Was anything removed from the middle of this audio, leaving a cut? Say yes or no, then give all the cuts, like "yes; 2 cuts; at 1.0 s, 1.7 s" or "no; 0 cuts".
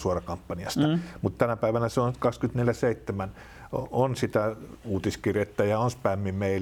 no; 0 cuts